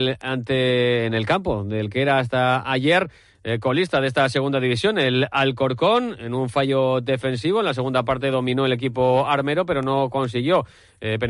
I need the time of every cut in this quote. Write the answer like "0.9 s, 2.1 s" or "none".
none